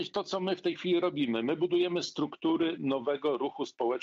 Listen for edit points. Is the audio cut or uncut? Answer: uncut